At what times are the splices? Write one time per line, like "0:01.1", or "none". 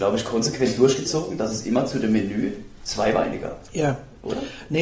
none